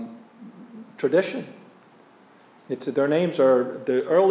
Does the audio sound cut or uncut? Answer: uncut